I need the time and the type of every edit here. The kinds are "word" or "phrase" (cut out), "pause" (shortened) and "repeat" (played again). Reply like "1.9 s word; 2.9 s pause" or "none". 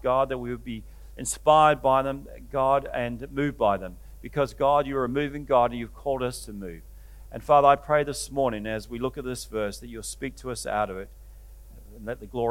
none

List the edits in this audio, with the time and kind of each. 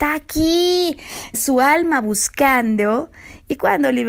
1.3 s word

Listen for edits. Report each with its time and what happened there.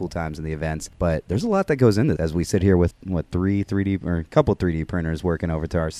2.2 s word; 2.9 s word

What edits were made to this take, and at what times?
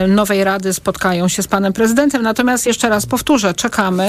none

